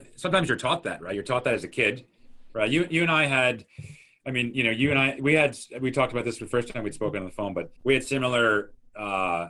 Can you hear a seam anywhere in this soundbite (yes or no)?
yes